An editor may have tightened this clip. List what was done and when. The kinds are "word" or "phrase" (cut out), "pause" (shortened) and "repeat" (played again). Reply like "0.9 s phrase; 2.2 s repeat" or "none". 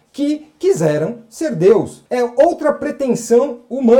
2.1 s pause